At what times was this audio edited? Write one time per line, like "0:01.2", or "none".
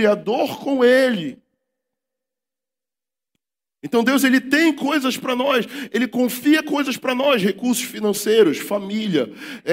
none